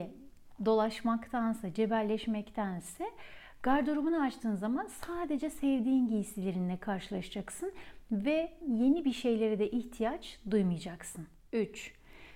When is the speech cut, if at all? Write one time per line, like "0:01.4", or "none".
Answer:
0:08.6